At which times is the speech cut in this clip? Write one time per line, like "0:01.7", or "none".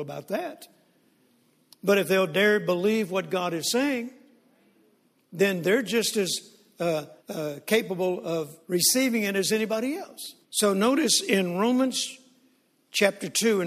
0:07.2
0:08.6
0:10.4